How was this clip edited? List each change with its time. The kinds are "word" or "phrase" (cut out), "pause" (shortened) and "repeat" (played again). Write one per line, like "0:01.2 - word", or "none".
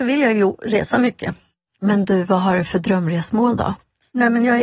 none